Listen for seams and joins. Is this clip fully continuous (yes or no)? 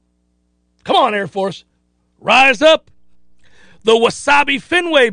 yes